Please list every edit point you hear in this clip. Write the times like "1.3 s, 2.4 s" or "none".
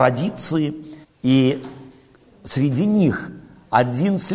1.0 s